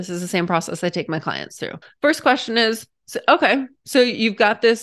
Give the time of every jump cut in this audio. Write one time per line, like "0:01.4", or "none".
0:01.8
0:02.9